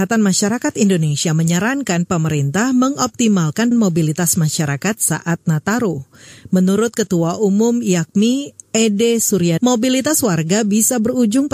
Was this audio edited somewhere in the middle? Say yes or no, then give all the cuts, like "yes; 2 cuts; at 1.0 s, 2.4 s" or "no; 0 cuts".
yes; 2 cuts; at 3.7 s, 9.6 s